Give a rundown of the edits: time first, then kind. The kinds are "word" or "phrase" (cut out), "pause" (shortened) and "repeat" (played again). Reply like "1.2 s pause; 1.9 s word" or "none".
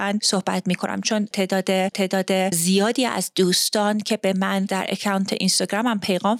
1.9 s repeat